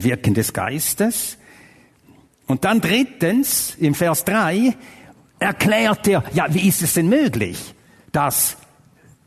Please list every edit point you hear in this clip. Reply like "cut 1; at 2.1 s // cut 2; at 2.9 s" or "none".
none

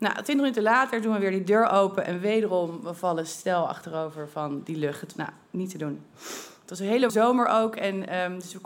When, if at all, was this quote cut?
cut 1; at 5.1 s // cut 2; at 7.1 s

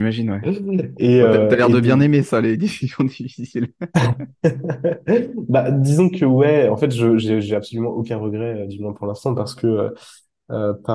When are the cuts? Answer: none

